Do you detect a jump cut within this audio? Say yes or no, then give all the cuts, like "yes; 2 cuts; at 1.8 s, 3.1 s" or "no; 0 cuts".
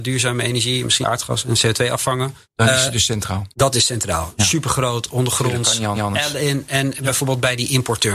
yes; 4 cuts; at 1.0 s, 2.4 s, 3.5 s, 5.9 s